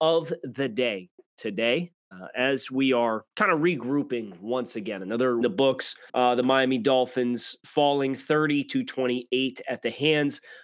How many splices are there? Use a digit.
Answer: 3